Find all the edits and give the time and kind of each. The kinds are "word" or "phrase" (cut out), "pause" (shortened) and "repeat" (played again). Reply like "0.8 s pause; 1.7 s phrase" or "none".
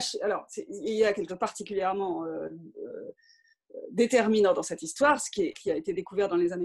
1.3 s word; 5.5 s word